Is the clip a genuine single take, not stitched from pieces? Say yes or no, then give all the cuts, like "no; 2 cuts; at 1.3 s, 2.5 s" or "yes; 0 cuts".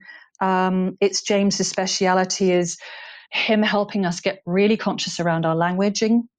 no; 1 cut; at 3.2 s